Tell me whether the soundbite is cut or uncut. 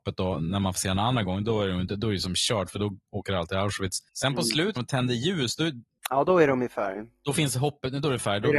cut